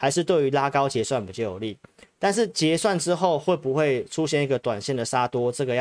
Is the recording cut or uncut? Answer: uncut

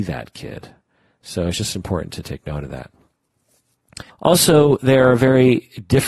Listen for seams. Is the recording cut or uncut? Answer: cut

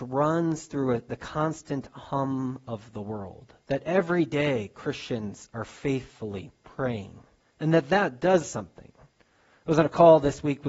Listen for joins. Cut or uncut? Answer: cut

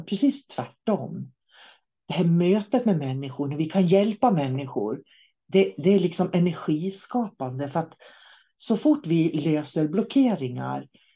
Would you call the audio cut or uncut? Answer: uncut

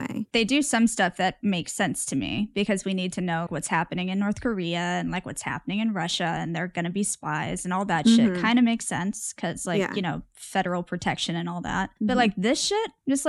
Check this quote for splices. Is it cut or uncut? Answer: cut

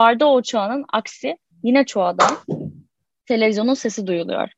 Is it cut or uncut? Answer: uncut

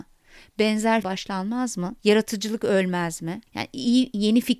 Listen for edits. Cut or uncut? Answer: cut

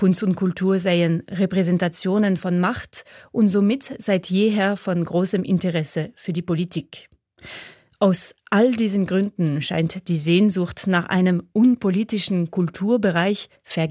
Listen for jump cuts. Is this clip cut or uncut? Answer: uncut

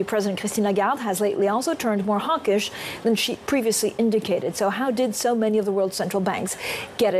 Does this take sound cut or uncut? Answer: uncut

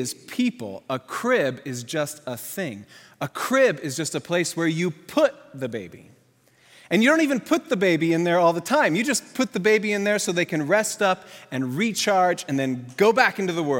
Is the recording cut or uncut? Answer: uncut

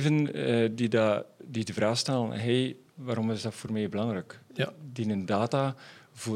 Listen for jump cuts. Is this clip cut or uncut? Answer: uncut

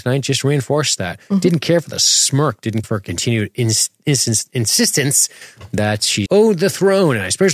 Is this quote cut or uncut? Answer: cut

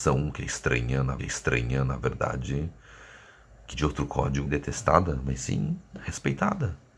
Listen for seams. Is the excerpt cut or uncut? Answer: cut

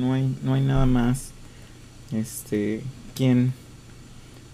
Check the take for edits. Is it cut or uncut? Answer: cut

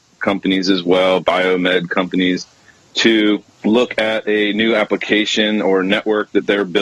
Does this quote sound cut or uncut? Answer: uncut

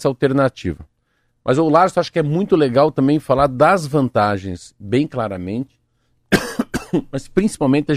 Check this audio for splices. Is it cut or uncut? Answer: uncut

